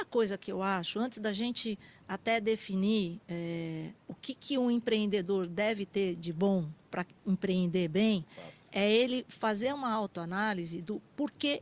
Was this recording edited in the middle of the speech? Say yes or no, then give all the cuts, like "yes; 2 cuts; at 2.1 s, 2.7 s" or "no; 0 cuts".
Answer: yes; 1 cut; at 4.0 s